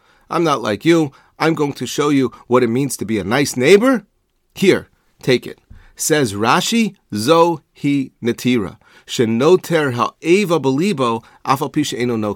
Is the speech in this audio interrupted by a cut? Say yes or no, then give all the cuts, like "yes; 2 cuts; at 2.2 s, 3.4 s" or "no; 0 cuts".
no; 0 cuts